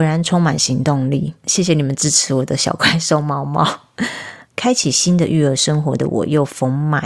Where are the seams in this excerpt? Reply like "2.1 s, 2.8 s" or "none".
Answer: none